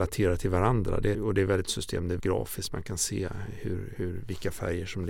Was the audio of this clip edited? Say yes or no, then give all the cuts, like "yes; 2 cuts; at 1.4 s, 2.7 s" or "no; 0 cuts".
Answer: yes; 4 cuts; at 1.1 s, 1.6 s, 2.2 s, 4.0 s